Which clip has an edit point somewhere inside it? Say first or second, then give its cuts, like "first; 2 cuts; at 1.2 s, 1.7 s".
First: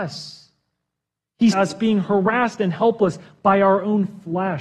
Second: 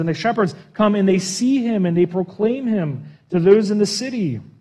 first; 1 cut; at 1.5 s